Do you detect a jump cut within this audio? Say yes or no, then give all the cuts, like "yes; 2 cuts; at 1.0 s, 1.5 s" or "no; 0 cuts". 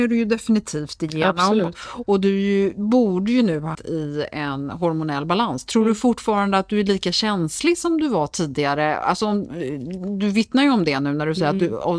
yes; 1 cut; at 3.7 s